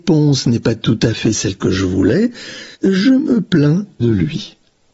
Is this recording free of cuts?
no; 2 cuts; at 2.7 s, 4.0 s

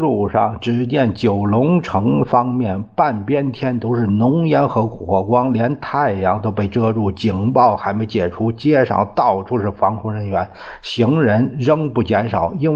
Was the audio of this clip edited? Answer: no; 0 cuts

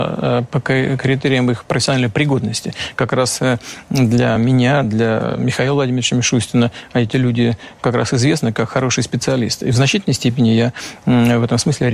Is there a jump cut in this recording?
no; 0 cuts

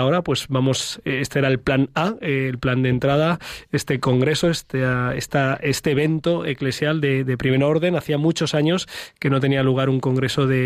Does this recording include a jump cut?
no; 0 cuts

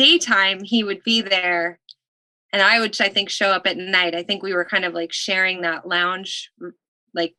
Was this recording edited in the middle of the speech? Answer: no; 0 cuts

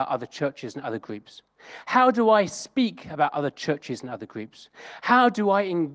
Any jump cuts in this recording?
no; 0 cuts

